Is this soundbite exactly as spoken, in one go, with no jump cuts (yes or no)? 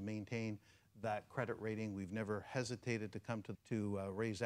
no